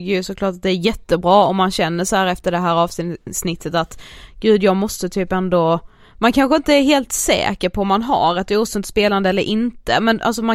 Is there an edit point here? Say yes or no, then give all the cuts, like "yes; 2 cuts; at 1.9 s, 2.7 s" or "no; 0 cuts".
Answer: no; 0 cuts